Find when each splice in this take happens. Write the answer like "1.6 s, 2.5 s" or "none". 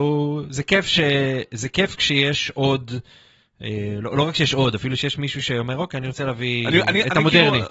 none